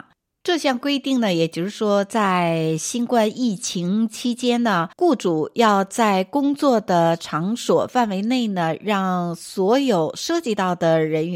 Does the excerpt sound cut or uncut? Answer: cut